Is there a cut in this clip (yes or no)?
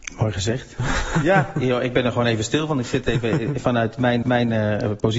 yes